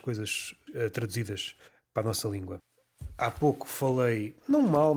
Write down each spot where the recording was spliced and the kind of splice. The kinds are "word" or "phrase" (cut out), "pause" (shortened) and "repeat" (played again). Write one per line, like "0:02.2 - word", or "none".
0:01.6 - pause